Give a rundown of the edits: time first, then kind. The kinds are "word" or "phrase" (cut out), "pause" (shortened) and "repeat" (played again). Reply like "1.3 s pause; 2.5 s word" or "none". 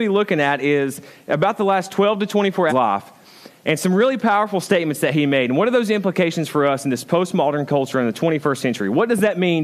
2.7 s phrase